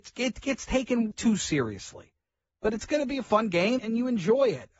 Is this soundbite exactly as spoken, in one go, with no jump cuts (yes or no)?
no